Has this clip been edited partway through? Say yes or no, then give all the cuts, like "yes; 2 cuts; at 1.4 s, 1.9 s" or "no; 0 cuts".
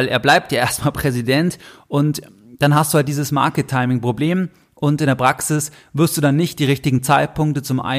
no; 0 cuts